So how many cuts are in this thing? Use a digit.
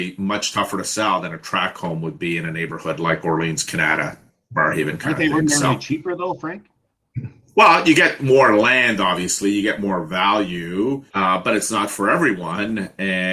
1